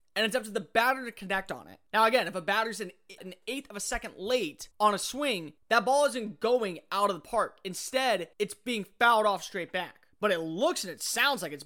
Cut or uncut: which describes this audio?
cut